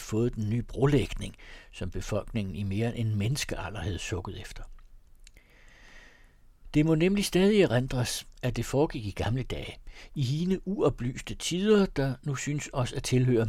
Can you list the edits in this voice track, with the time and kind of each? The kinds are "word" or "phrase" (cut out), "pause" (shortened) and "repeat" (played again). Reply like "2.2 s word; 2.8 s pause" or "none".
8.3 s pause